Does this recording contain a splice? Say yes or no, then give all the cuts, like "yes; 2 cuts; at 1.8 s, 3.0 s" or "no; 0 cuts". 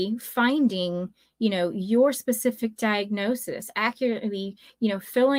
no; 0 cuts